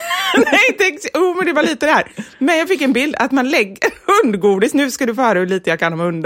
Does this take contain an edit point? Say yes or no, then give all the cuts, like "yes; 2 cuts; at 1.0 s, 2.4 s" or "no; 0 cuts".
no; 0 cuts